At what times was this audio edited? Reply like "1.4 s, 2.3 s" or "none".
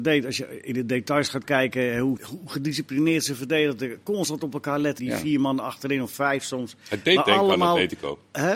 2.2 s, 5.0 s